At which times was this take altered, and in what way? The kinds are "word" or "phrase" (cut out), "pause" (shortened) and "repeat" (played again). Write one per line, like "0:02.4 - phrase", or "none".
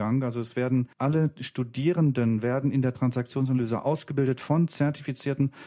0:00.9 - pause